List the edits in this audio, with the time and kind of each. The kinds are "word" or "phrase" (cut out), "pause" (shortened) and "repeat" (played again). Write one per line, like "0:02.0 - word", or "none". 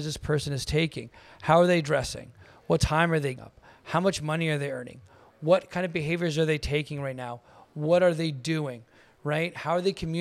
0:03.4 - word